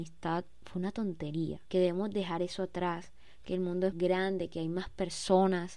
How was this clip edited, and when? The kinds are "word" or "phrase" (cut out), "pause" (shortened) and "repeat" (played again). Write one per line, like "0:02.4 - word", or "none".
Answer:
0:03.9 - word